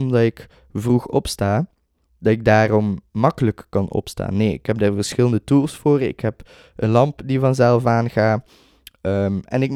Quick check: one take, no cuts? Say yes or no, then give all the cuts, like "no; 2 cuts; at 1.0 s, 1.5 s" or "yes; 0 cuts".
yes; 0 cuts